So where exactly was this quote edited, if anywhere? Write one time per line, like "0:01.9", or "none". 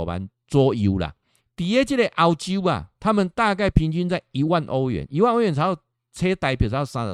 0:01.4